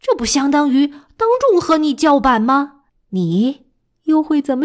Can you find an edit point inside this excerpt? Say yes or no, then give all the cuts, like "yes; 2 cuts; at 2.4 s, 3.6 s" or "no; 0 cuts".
yes; 1 cut; at 2.9 s